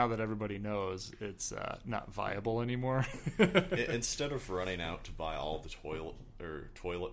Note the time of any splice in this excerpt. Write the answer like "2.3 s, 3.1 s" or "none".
none